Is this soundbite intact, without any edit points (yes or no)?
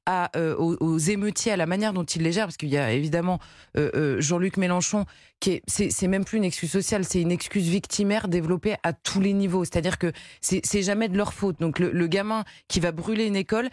yes